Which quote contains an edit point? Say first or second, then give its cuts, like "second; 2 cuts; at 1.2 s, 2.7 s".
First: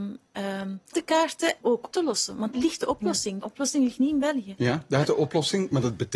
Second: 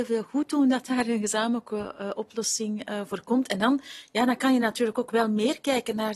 first; 6 cuts; at 0.9 s, 1.6 s, 1.9 s, 2.5 s, 3.4 s, 5.0 s